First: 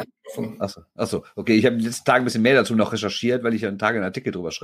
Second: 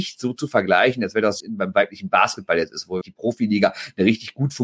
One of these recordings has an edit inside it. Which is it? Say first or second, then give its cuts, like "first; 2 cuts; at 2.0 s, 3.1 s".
second; 2 cuts; at 1.4 s, 3.0 s